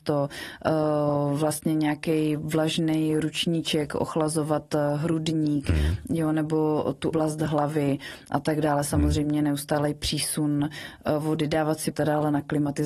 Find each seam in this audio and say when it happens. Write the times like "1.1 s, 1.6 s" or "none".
7.1 s, 11.9 s